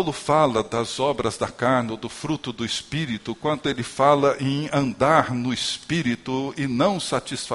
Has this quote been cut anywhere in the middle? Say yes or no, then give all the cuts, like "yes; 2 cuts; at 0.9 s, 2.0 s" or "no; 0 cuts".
no; 0 cuts